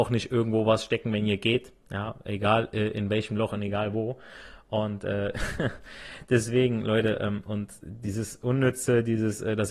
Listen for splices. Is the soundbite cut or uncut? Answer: uncut